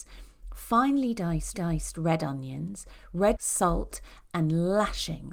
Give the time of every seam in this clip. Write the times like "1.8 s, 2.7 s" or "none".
1.5 s, 3.3 s